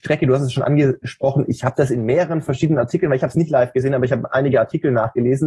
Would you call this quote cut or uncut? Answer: uncut